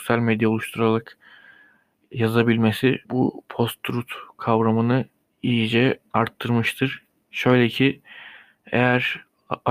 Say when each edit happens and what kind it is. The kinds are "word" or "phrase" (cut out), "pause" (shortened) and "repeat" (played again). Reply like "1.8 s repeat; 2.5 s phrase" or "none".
3.0 s pause; 5.2 s pause